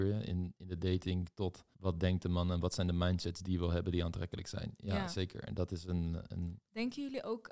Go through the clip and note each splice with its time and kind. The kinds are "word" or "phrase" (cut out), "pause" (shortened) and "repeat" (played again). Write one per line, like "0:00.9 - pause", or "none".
0:01.7 - pause